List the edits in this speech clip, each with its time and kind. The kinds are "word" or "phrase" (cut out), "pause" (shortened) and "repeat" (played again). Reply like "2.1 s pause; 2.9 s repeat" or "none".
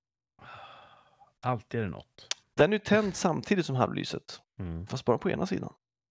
none

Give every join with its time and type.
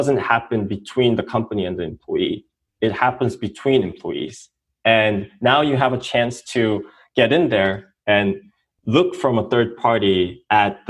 none

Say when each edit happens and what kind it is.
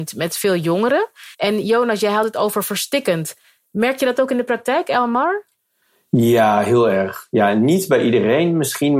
1.3 s pause

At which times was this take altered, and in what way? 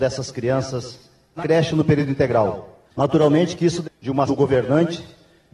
1.4 s word; 2.9 s pause; 3.8 s word; 4.3 s word

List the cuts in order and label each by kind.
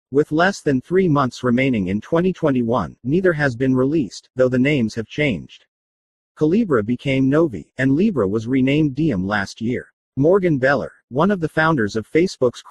none

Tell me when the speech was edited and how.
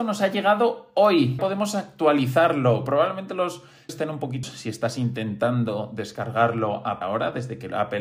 1.4 s word; 3.9 s word; 4.4 s word; 7.0 s word

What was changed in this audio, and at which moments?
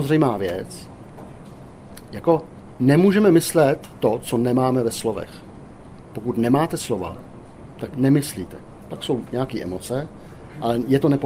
7.9 s word

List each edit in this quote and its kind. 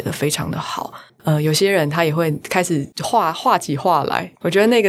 2.9 s pause

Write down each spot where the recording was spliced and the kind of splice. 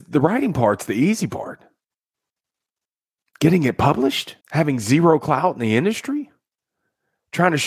4.4 s pause

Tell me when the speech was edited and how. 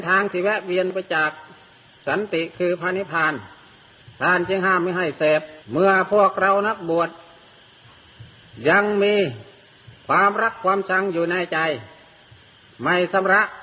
5.6 s pause; 10.0 s pause

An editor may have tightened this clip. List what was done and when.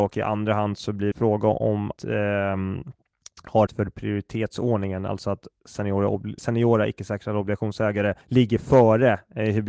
1.1 s phrase; 2.0 s word; 3.7 s word; 6.4 s word; 8.2 s pause

